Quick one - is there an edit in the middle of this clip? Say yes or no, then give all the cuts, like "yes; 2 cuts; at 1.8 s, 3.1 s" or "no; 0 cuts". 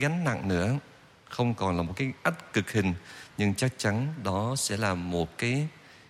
no; 0 cuts